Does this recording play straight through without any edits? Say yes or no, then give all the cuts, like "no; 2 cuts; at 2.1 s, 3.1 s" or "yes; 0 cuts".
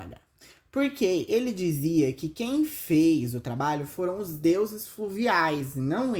yes; 0 cuts